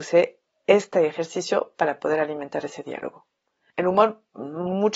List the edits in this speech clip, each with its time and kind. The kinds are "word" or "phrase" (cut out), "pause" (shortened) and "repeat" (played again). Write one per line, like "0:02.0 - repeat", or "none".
none